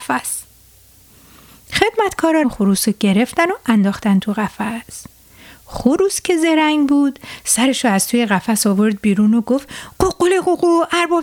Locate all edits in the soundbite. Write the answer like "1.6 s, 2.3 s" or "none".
2.4 s

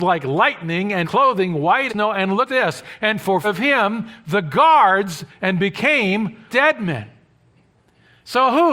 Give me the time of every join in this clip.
1.0 s, 1.9 s, 2.5 s, 3.4 s, 5.3 s, 6.5 s

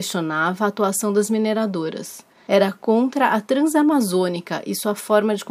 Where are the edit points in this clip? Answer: none

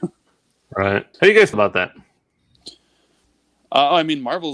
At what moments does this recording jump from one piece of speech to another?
1.1 s, 1.5 s, 3.2 s

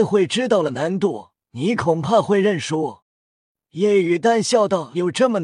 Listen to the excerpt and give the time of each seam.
1.4 s, 3.0 s

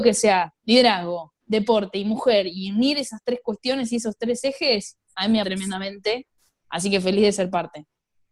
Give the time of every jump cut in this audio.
1.4 s, 5.4 s

